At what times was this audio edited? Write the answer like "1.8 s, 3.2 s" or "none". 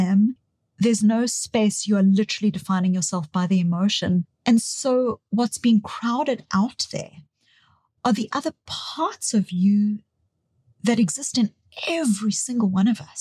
none